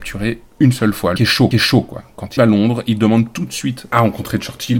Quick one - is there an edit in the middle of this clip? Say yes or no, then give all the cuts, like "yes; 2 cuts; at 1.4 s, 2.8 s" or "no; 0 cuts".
yes; 3 cuts; at 1.2 s, 1.5 s, 2.4 s